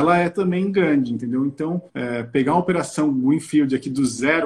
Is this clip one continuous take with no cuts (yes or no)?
no